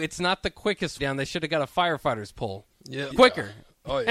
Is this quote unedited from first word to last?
no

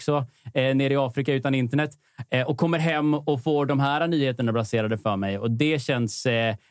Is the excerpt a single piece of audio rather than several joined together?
yes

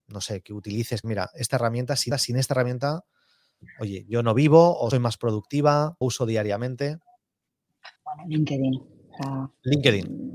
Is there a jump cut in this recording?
yes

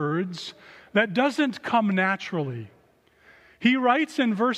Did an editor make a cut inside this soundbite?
no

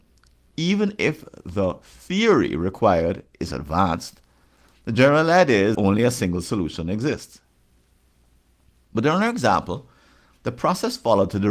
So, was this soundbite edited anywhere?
yes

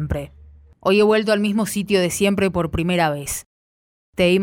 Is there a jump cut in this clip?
no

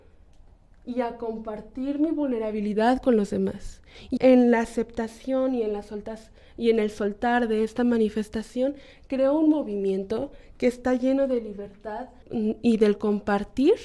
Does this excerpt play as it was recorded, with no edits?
no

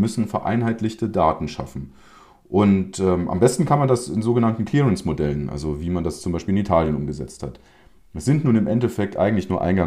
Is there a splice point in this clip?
no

